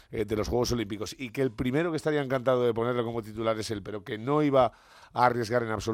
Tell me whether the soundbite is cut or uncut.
uncut